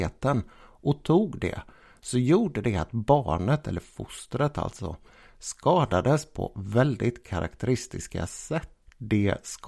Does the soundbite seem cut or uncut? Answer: uncut